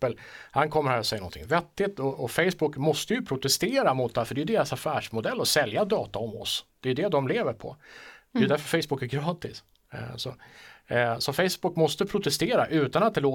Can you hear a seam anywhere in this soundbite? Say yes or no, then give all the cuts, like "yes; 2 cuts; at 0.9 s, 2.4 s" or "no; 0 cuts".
no; 0 cuts